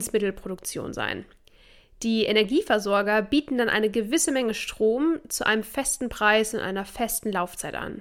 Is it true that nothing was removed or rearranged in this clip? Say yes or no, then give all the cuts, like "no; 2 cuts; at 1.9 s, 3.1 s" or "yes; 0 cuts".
yes; 0 cuts